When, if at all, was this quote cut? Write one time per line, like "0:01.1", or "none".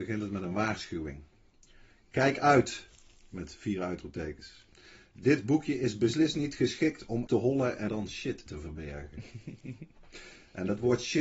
0:07.3
0:07.9
0:08.5